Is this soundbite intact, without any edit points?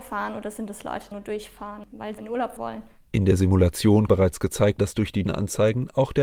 no; 6 cuts; at 1.1 s, 2.2 s, 2.6 s, 4.1 s, 4.8 s, 5.2 s

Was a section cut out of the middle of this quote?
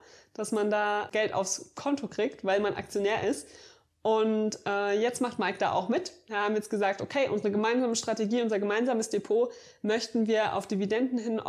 yes; 1 cut; at 1.1 s

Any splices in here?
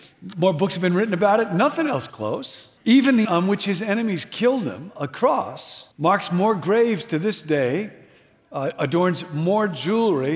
yes; 4 cuts; at 2.1 s, 2.8 s, 3.2 s, 5.9 s

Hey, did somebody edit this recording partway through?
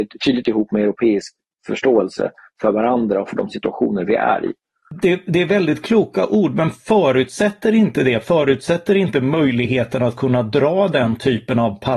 no; 0 cuts

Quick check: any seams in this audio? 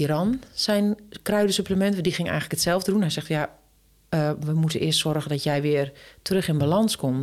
no; 0 cuts

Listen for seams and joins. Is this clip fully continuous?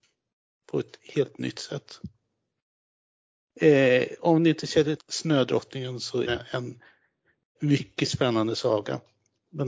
no; 3 cuts; at 5.0 s, 6.3 s, 7.5 s

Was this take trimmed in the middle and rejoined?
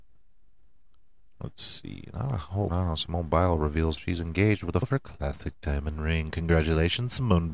yes; 3 cuts; at 2.7 s, 4.0 s, 4.8 s

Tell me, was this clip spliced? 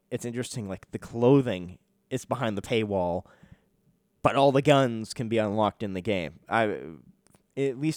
no; 0 cuts

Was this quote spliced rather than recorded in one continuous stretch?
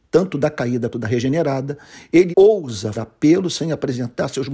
yes; 3 cuts; at 0.9 s, 2.3 s, 2.9 s

